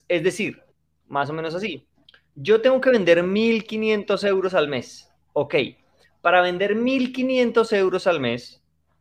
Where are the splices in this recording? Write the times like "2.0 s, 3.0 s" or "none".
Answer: none